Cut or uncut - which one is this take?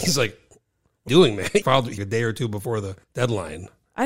cut